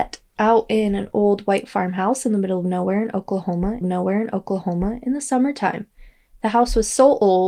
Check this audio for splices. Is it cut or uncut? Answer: cut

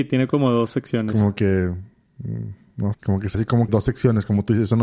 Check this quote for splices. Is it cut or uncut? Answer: cut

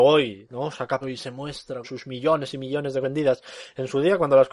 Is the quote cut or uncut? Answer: cut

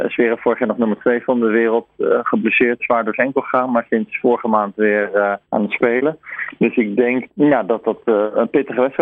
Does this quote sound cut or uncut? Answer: cut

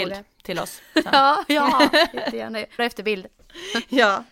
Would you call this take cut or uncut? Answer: cut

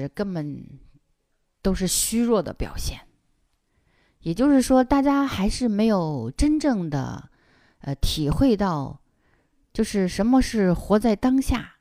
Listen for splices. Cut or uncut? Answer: uncut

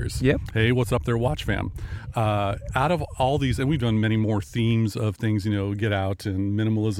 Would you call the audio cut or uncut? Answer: uncut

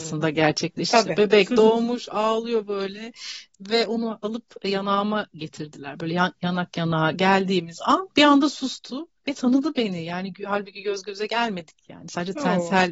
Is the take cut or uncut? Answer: cut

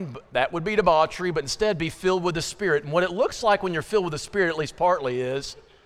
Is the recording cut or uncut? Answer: uncut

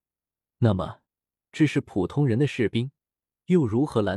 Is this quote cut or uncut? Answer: uncut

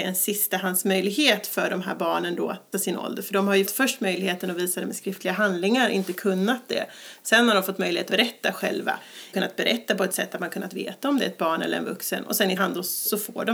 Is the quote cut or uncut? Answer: cut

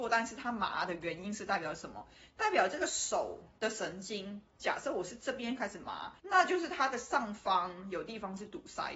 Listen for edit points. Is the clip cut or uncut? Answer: cut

